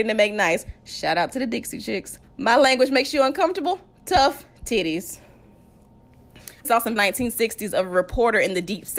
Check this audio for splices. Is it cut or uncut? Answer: cut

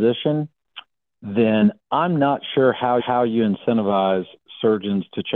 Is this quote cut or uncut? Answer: cut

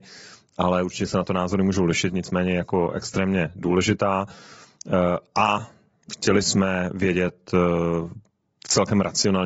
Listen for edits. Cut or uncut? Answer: cut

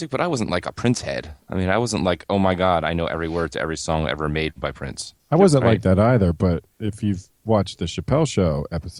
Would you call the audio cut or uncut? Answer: cut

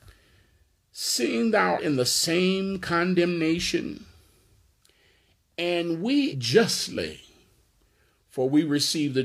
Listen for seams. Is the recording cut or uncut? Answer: cut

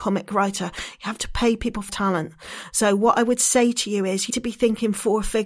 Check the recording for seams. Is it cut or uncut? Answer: cut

